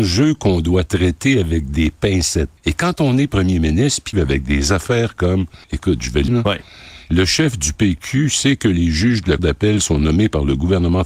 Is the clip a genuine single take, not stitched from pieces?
no; 5 cuts; at 2.6 s, 4.1 s, 5.6 s, 6.3 s, 9.4 s

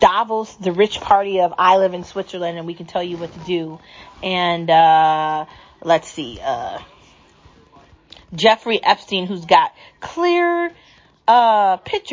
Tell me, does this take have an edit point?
no; 0 cuts

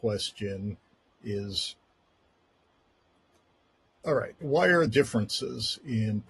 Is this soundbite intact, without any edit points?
no; 2 cuts; at 4.4 s, 4.9 s

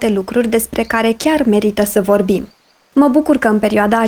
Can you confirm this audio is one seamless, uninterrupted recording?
yes; 0 cuts

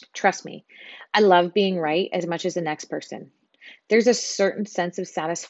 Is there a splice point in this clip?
no; 0 cuts

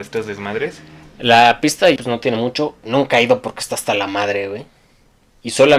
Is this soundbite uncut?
no; 2 cuts; at 2.0 s, 2.8 s

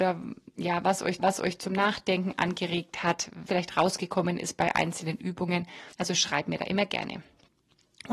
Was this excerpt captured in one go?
no; 3 cuts; at 1.2 s, 3.5 s, 5.9 s

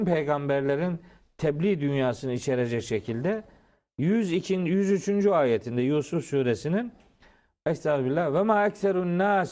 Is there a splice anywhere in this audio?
no; 0 cuts

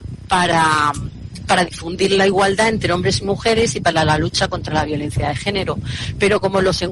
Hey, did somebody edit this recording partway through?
no; 0 cuts

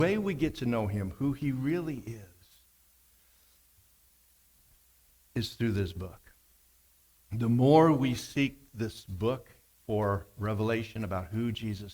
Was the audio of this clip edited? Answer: no; 0 cuts

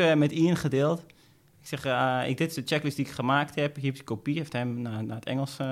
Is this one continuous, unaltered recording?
yes; 0 cuts

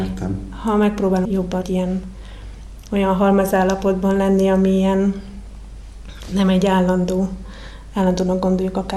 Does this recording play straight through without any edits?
no; 2 cuts; at 1.2 s, 1.6 s

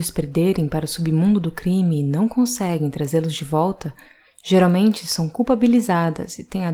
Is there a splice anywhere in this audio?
no; 0 cuts

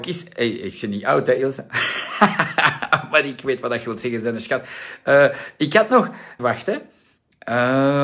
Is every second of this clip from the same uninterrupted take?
no; 1 cut; at 6.4 s

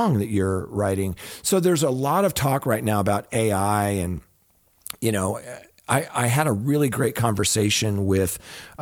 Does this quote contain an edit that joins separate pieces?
no; 0 cuts

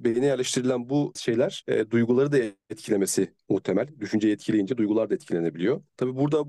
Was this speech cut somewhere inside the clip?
yes; 1 cut; at 1.2 s

